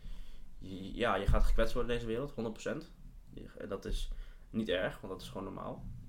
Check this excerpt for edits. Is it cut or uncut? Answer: uncut